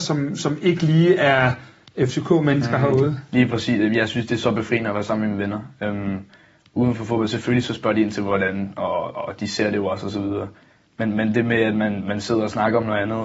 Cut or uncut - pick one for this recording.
uncut